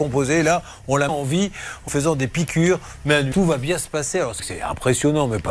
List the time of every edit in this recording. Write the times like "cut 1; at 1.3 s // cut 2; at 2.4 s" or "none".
cut 1; at 1.1 s // cut 2; at 1.9 s // cut 3; at 3.3 s // cut 4; at 4.4 s

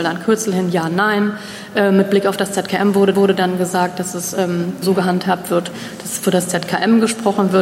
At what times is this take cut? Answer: cut 1; at 3.1 s // cut 2; at 4.8 s

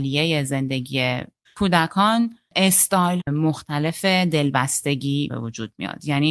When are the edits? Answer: cut 1; at 1.4 s // cut 2; at 3.2 s // cut 3; at 5.3 s

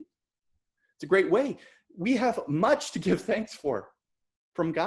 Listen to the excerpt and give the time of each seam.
none

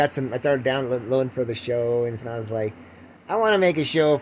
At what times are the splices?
cut 1; at 1.3 s // cut 2; at 2.2 s

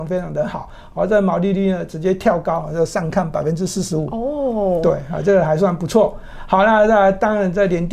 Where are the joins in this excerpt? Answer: none

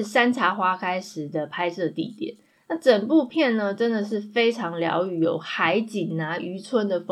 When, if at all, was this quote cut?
none

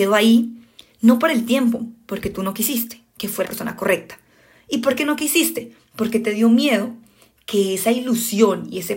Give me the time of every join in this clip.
cut 1; at 3.4 s

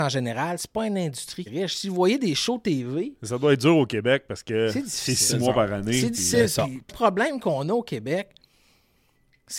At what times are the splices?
cut 1; at 1.5 s // cut 2; at 6.9 s

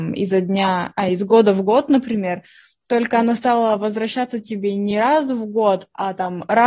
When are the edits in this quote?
none

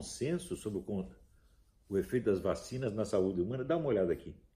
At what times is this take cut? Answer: none

